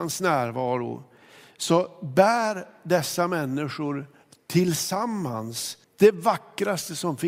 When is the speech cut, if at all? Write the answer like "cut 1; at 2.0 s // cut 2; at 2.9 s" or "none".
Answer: cut 1; at 5.8 s